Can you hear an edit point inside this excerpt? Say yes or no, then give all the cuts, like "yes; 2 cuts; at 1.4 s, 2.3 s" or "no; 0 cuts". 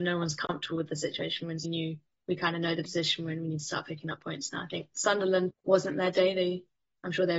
yes; 2 cuts; at 1.6 s, 5.5 s